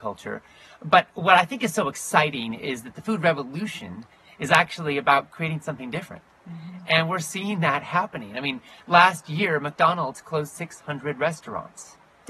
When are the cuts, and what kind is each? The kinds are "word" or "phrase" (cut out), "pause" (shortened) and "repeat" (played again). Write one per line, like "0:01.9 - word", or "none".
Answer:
none